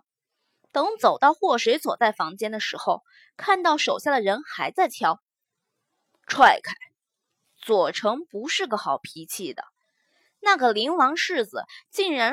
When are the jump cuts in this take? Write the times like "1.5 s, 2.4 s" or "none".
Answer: none